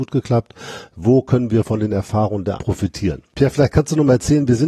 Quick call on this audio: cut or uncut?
cut